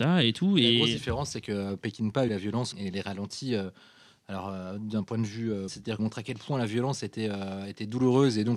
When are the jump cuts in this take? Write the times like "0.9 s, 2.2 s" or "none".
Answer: 2.3 s, 2.7 s, 5.7 s, 6.0 s